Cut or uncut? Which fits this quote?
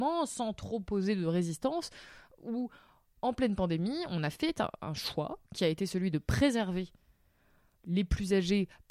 uncut